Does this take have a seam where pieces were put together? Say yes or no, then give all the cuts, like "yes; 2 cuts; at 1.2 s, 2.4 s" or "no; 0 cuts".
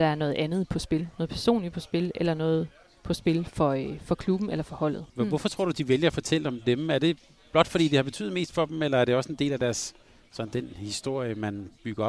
no; 0 cuts